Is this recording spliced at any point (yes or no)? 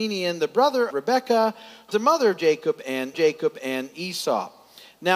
yes